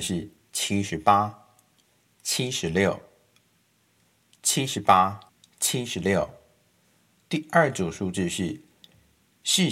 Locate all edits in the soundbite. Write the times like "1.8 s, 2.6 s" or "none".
5.3 s